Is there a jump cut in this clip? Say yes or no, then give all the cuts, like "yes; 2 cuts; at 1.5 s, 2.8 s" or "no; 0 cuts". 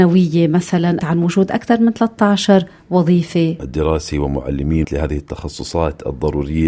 yes; 3 cuts; at 1.0 s, 3.6 s, 4.8 s